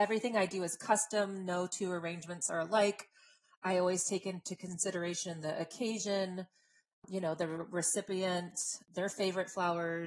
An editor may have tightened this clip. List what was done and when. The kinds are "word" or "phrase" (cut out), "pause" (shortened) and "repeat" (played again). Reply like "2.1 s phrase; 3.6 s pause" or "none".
none